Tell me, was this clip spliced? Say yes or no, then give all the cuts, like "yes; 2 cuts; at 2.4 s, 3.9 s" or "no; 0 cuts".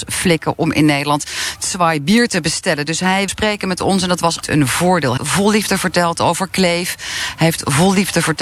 yes; 3 cuts; at 3.3 s, 4.4 s, 5.2 s